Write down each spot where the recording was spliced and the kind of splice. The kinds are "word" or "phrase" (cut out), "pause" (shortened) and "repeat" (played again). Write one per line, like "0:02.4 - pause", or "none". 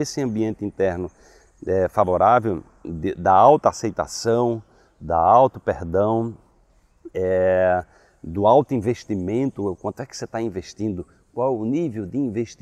none